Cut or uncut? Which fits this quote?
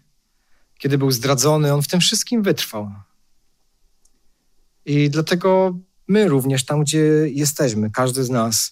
uncut